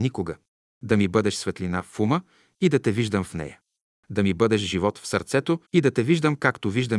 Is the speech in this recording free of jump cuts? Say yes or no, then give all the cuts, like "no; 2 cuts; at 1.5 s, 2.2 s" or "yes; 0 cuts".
no; 1 cut; at 5.6 s